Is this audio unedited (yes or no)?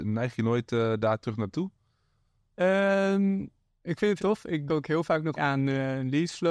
no